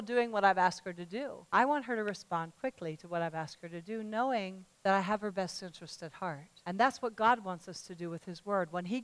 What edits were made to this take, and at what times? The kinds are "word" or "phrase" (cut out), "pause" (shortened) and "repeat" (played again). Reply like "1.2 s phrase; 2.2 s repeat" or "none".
1.5 s pause; 4.7 s pause; 6.6 s pause